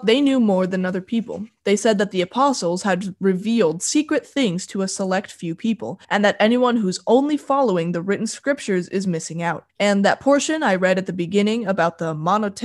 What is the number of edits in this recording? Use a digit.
2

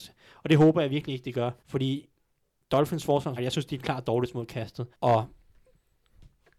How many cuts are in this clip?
3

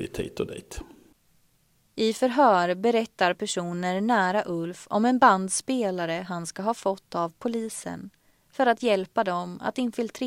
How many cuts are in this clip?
0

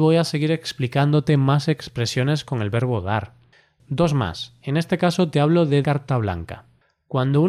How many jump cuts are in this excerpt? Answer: 1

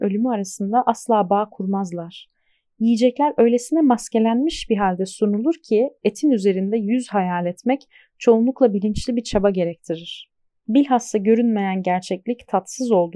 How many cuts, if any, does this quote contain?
0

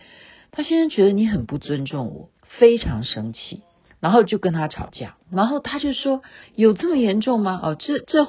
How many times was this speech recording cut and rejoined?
3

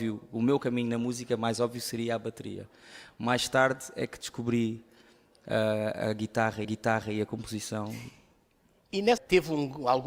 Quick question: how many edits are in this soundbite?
2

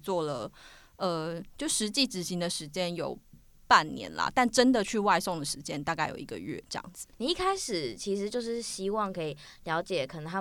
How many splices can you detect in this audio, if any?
0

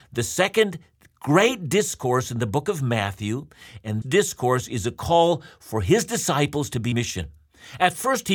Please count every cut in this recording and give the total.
2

